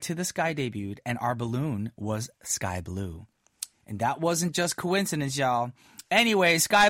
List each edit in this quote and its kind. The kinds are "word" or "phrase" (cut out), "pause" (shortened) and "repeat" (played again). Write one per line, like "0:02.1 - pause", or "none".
none